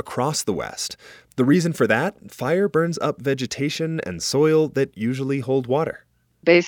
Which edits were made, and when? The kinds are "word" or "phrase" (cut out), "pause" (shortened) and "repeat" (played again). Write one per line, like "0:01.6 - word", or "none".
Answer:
none